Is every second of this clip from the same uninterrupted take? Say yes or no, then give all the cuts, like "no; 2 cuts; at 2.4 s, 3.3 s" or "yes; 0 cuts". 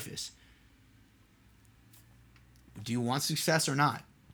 yes; 0 cuts